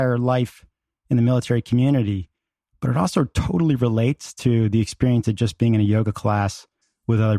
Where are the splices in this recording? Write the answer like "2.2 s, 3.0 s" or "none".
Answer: none